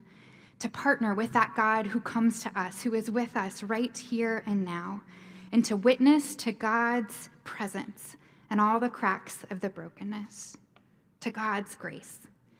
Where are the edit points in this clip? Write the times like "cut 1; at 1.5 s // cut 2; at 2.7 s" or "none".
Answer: none